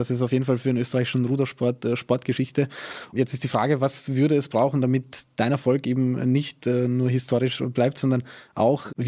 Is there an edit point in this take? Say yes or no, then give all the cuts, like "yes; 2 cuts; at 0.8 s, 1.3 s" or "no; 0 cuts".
no; 0 cuts